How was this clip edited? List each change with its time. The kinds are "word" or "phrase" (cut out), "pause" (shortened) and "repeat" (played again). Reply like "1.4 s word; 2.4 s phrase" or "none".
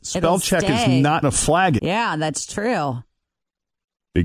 1.2 s word; 1.8 s word